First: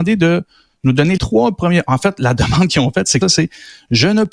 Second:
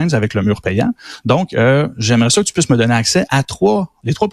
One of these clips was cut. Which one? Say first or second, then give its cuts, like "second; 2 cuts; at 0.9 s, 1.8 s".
first; 2 cuts; at 1.2 s, 3.2 s